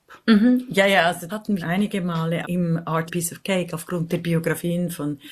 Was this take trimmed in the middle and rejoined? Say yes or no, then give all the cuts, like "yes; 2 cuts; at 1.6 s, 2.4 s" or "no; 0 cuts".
yes; 4 cuts; at 1.3 s, 1.6 s, 2.4 s, 3.1 s